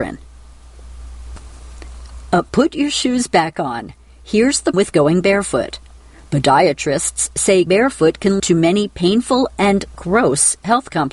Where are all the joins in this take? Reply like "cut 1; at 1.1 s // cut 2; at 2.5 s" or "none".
cut 1; at 2.5 s // cut 2; at 4.7 s // cut 3; at 7.7 s // cut 4; at 8.4 s